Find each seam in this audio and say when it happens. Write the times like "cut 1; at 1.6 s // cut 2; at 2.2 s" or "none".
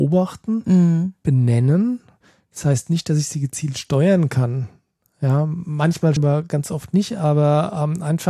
cut 1; at 6.2 s